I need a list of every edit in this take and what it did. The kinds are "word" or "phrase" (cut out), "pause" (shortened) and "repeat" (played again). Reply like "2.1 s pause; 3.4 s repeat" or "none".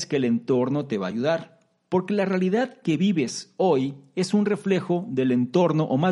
none

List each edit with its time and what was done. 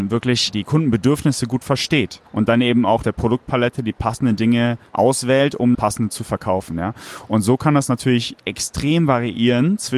2.3 s pause; 3.0 s phrase; 5.7 s phrase

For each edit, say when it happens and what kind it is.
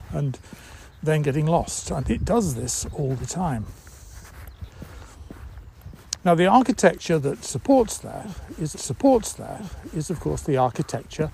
2.0 s word; 8.7 s repeat

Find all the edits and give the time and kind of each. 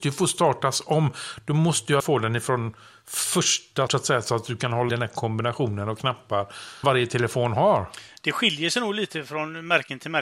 2.0 s word; 3.9 s word; 4.9 s word; 6.8 s word

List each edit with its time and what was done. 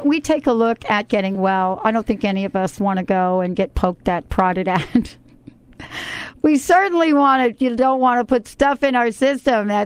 none

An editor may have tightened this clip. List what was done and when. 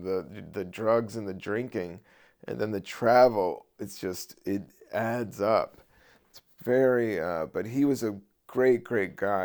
none

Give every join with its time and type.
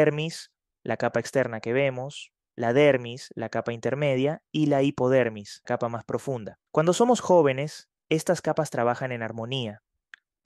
5.6 s word; 6.7 s pause

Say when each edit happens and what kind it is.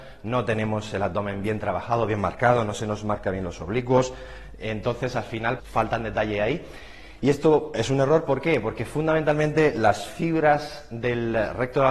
5.6 s word

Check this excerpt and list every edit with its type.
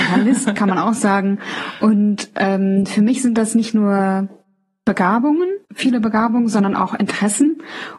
5.6 s pause

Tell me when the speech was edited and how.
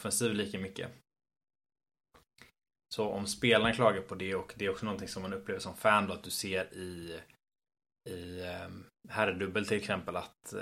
none

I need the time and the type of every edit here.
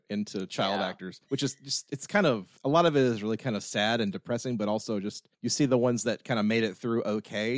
1.2 s pause; 2.6 s pause; 5.3 s pause

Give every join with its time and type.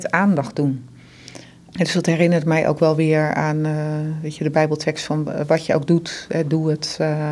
none

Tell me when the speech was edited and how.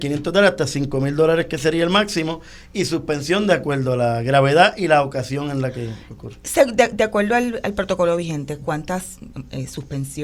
none

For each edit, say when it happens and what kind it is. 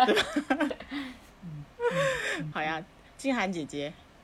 2.5 s word

